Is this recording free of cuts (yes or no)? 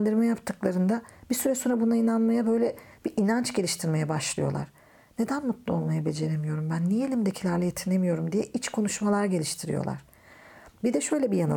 yes